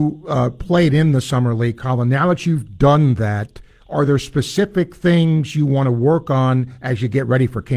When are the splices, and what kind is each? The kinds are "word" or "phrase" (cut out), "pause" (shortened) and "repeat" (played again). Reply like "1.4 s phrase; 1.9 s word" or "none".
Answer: none